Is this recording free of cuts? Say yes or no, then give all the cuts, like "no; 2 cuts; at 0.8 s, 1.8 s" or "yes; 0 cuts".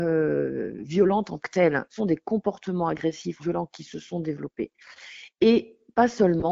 no; 3 cuts; at 1.4 s, 2.0 s, 3.4 s